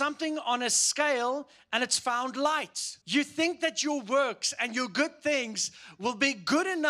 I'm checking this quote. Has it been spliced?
yes; 1 cut; at 3.0 s

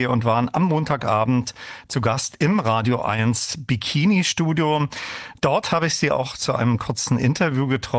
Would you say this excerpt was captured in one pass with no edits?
yes; 0 cuts

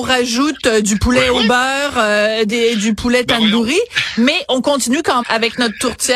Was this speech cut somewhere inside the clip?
yes; 1 cut; at 5.2 s

